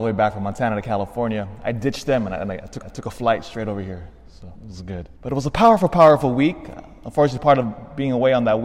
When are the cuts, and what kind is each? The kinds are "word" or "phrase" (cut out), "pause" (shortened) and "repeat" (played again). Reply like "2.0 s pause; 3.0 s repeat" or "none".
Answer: 2.8 s repeat; 4.5 s pause; 5.2 s pause